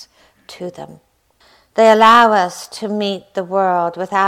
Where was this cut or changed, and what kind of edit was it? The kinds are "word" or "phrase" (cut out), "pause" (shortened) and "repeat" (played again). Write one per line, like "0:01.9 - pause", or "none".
0:01.4 - pause